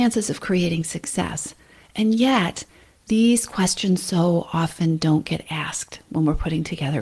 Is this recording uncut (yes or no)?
yes